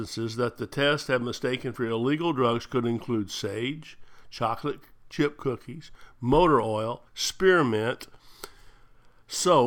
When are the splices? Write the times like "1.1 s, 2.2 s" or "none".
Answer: 7.1 s

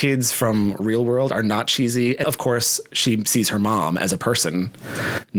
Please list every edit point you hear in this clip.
2.2 s

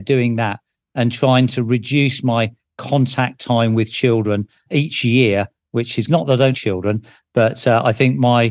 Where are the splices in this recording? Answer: 4.7 s, 6.1 s, 6.5 s

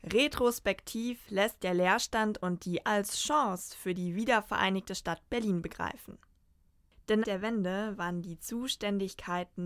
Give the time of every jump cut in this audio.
1.6 s, 2.8 s, 7.2 s

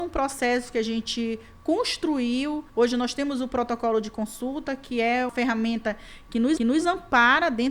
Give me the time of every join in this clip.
2.7 s, 5.3 s, 6.6 s

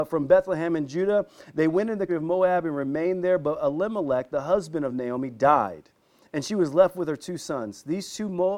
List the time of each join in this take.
2.1 s

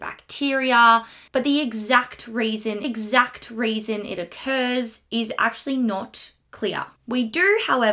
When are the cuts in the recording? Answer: 1.3 s, 2.8 s, 7.0 s

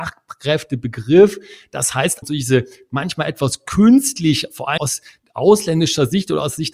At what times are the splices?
2.2 s, 4.8 s

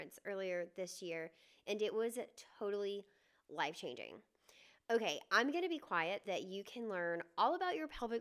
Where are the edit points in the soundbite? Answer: 6.2 s

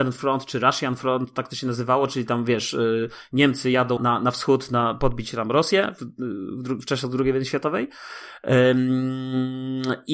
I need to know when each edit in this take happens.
4.0 s

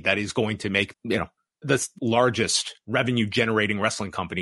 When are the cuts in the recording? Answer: 0.9 s, 1.6 s, 2.0 s

